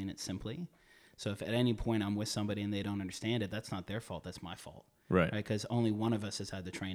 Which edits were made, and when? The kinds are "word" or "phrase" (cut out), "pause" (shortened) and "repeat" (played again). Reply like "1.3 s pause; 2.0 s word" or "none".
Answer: none